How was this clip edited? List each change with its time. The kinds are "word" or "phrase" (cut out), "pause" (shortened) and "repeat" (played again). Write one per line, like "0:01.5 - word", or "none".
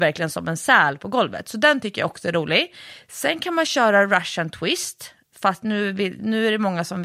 none